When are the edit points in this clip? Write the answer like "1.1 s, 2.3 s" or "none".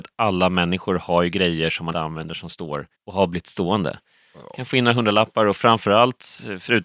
1.9 s, 2.9 s